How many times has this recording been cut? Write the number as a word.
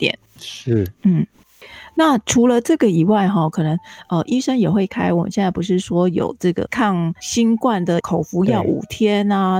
one